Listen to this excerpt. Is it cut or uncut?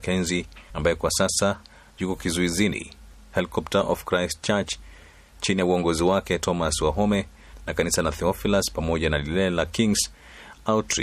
uncut